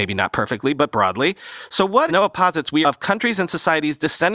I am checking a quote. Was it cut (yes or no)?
yes